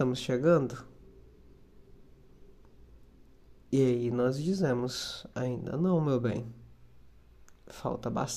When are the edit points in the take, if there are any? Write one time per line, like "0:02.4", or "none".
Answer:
none